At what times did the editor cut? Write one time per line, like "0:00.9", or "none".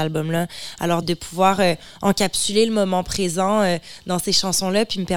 0:01.0